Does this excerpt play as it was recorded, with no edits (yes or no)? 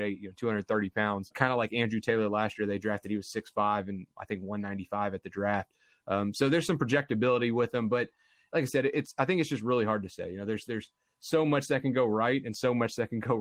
yes